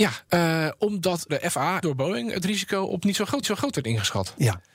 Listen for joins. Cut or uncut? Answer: cut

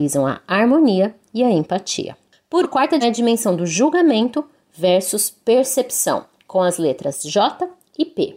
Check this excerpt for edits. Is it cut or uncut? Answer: cut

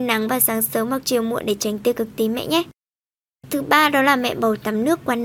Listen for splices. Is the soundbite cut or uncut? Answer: uncut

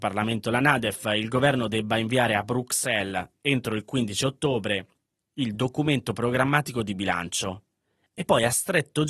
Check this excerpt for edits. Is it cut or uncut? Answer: uncut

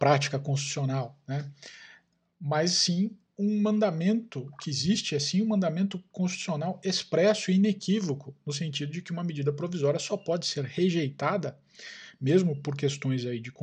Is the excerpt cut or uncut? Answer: uncut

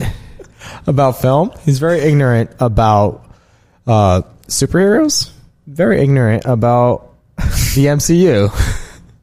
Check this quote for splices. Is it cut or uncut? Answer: uncut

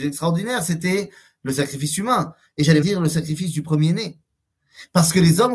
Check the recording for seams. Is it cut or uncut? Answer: cut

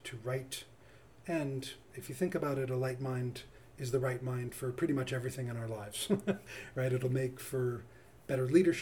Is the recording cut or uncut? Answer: uncut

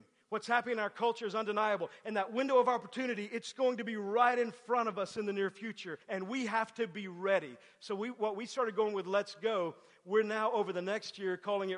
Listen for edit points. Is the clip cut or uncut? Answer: cut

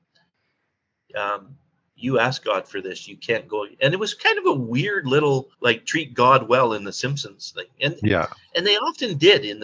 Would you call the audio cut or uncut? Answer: cut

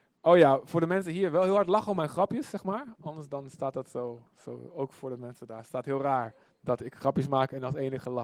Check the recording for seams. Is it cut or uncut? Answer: uncut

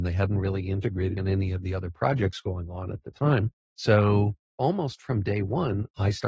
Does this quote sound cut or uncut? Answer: cut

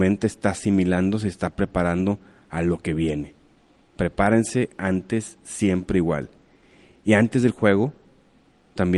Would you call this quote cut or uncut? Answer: uncut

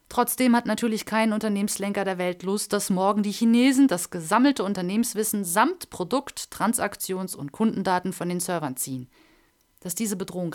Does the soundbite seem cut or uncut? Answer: uncut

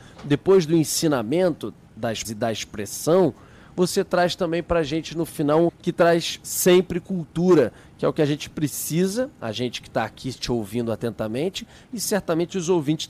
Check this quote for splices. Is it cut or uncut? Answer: cut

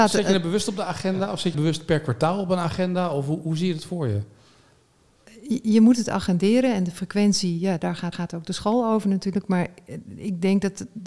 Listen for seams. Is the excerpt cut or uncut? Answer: cut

